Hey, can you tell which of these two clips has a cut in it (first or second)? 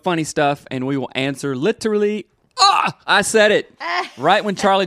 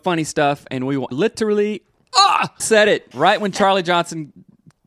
second